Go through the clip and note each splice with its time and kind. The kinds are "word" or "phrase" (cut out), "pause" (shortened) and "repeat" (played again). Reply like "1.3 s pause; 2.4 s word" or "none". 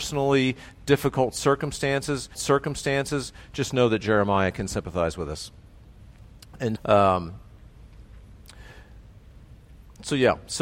2.3 s repeat; 6.8 s word